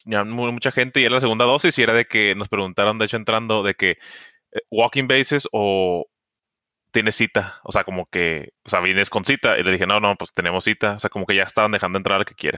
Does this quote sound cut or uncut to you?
uncut